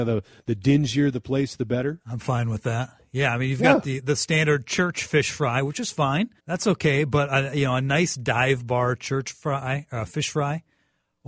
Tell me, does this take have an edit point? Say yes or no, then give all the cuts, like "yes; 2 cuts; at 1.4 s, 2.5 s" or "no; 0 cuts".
yes; 1 cut; at 6.4 s